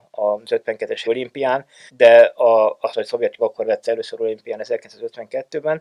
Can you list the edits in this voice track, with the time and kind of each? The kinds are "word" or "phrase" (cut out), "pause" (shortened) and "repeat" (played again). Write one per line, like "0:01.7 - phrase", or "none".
0:01.0 - word
0:01.9 - word
0:02.9 - phrase
0:03.4 - word
0:03.8 - word